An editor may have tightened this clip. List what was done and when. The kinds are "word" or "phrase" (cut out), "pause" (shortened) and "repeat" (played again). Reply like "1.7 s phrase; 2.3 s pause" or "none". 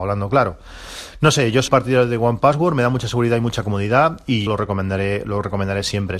1.7 s word; 4.5 s word